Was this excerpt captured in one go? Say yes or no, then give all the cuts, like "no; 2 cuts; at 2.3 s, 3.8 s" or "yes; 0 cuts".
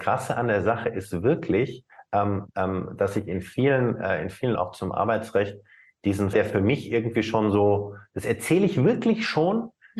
no; 2 cuts; at 4.6 s, 6.3 s